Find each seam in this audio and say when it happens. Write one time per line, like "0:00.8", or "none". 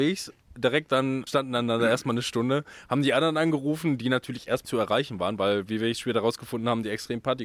0:01.3
0:04.6